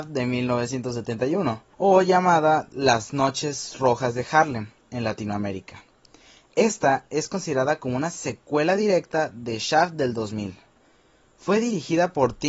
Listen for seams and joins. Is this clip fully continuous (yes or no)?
yes